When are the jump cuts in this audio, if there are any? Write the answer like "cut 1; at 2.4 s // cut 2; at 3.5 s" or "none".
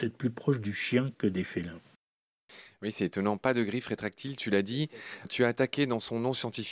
none